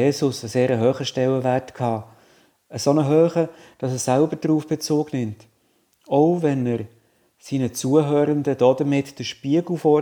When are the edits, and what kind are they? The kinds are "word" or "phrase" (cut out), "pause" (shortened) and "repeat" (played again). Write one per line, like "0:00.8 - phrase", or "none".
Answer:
none

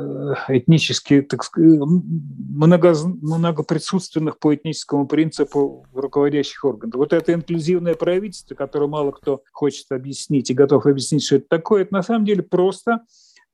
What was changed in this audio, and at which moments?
0:09.5 - pause

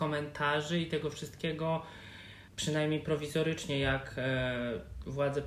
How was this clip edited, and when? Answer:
0:02.5 - pause

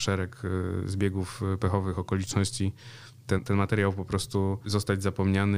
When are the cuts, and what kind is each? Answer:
0:03.4 - word
0:04.6 - word

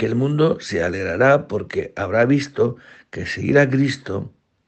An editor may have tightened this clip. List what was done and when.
none

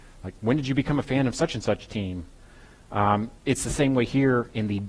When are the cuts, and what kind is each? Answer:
none

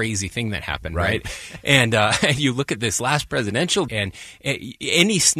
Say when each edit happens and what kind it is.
0:03.9 - word

